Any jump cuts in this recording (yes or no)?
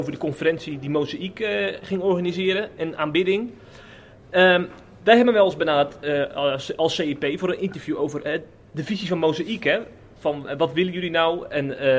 no